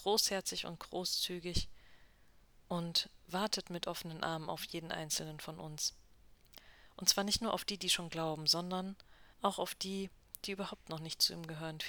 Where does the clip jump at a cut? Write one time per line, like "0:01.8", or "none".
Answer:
0:09.3